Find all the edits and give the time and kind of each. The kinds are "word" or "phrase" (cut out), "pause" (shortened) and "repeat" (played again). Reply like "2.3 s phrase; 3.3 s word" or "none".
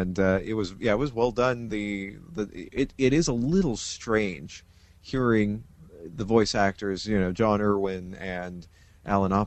none